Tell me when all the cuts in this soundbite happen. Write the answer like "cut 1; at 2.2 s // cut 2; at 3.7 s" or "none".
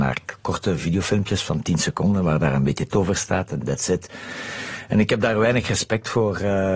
cut 1; at 2.9 s

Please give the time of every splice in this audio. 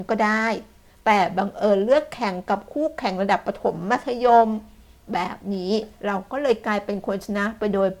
cut 1; at 6.0 s

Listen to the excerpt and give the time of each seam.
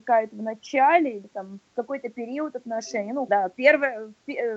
cut 1; at 1.7 s // cut 2; at 3.3 s

